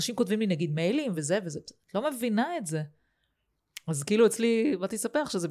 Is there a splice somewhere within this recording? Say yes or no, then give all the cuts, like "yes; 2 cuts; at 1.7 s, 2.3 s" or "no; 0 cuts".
no; 0 cuts